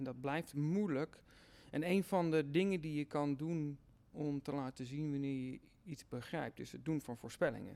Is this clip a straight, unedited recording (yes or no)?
yes